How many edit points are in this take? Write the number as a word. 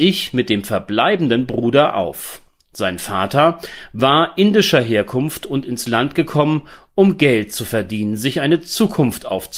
zero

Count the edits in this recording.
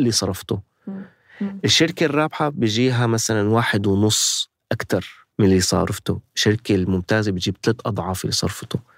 one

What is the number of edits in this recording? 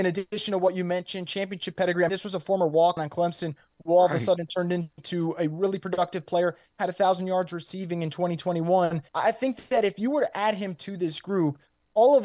three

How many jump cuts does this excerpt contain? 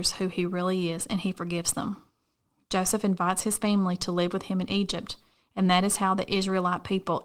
zero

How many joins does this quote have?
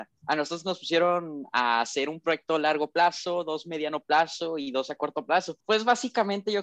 one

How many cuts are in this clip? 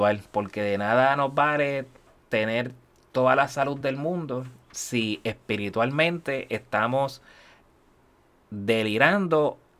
zero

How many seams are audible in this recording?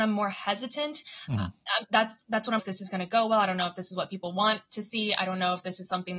one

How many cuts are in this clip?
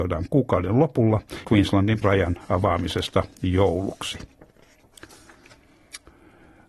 two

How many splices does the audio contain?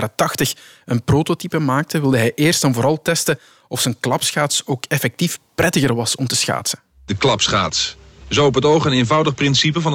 zero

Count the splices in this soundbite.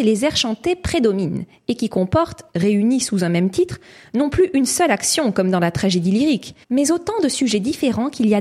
one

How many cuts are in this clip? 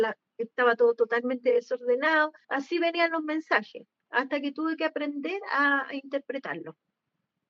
one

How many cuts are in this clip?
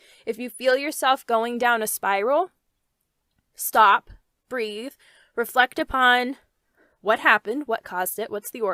zero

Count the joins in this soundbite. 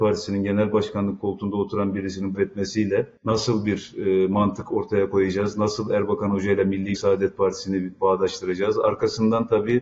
two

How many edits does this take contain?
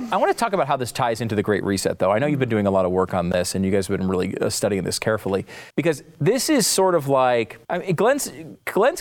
two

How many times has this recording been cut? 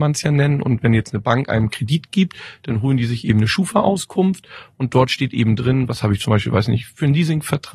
zero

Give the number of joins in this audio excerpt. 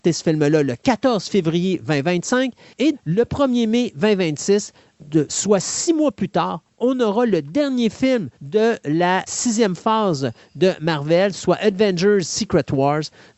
four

